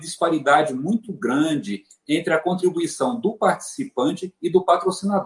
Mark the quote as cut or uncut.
uncut